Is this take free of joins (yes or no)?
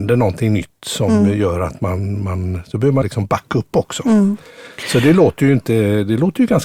no